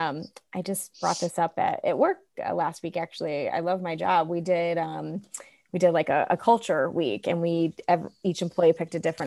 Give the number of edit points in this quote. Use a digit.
0